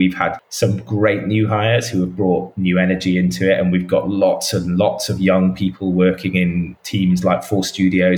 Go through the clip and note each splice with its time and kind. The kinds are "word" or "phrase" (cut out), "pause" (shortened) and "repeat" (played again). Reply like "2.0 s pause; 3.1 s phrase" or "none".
none